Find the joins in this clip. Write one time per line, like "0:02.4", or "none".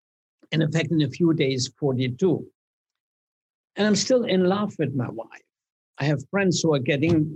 none

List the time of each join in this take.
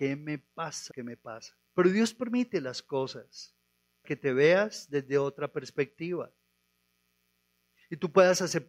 0:00.9
0:01.7
0:04.0

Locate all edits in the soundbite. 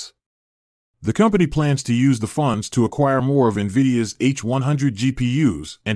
none

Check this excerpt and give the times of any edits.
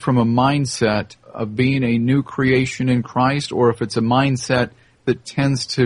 0:01.2

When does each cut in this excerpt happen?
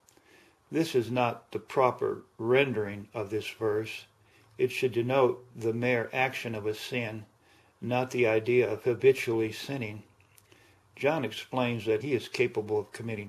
0:12.0

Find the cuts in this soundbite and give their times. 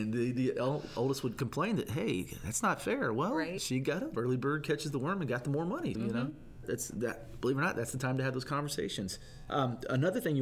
0:05.9
0:06.6

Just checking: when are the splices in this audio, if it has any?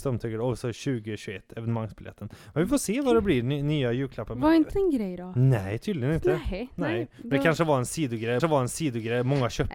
0:04.7
0:08.4

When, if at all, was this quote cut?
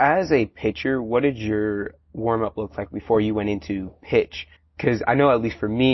0:04.6

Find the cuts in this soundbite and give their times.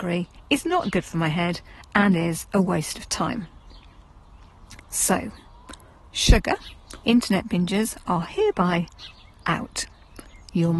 0:04.8
0:07.0

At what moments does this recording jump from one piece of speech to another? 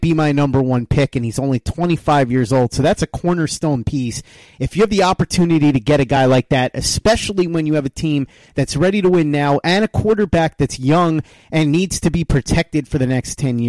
none

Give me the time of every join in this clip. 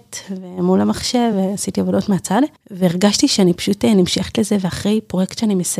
none

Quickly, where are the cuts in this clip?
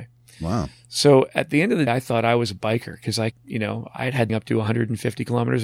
0:01.9
0:03.3
0:04.3

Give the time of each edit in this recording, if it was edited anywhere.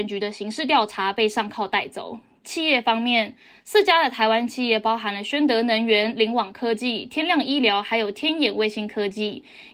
none

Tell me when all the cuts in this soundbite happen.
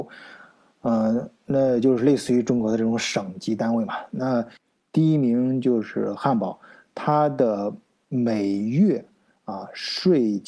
none

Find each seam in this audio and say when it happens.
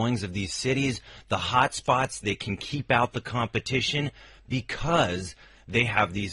none

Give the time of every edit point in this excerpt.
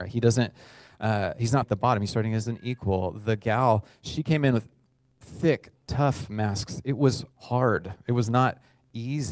0:01.6
0:07.3

